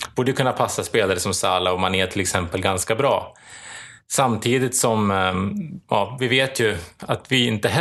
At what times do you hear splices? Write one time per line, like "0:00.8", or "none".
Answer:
none